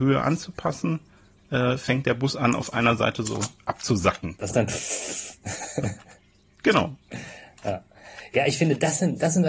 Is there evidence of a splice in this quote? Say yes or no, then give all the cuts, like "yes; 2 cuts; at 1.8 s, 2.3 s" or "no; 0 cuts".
yes; 1 cut; at 4.5 s